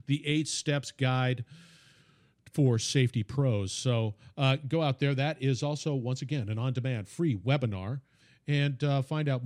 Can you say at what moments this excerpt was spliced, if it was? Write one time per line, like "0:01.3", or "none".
none